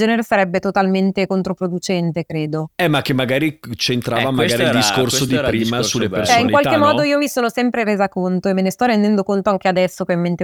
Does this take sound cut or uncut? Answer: uncut